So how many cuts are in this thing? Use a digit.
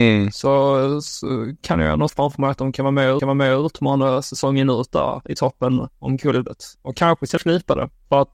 3